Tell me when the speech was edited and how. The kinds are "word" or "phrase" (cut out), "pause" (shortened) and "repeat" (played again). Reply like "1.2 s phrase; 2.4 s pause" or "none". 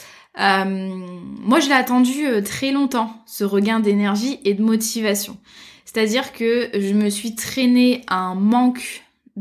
none